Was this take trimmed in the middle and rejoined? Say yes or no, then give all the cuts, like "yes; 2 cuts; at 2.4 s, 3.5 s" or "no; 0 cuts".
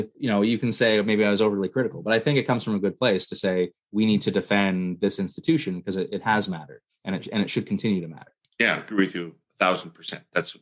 no; 0 cuts